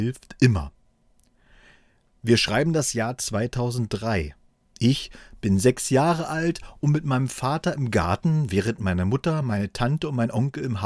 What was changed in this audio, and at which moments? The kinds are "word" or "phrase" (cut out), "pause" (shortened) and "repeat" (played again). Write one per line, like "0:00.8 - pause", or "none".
none